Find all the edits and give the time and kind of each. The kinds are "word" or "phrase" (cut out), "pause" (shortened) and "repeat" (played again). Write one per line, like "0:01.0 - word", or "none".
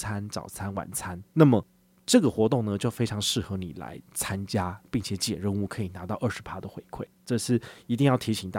0:01.3 - pause
0:07.1 - pause